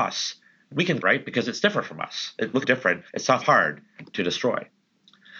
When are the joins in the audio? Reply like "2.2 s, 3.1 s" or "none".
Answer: 1.0 s, 2.6 s, 3.1 s, 3.4 s